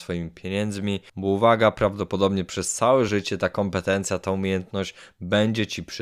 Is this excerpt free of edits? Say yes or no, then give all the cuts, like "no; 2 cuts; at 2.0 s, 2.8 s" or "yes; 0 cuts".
yes; 0 cuts